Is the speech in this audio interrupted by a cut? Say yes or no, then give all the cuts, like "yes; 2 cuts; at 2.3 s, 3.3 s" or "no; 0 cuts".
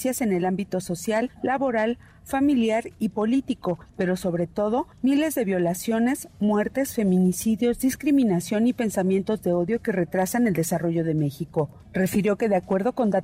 no; 0 cuts